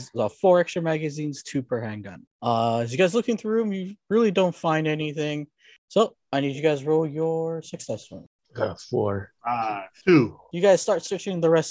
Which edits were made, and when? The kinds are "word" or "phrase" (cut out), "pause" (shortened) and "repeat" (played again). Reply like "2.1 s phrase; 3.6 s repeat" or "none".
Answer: none